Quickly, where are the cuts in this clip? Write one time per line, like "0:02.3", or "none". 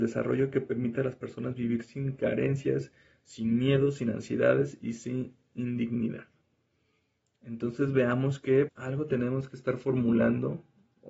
0:08.7